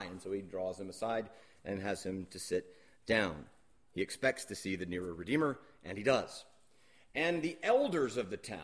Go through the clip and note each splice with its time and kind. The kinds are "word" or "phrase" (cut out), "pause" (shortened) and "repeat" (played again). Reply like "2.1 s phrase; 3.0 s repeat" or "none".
none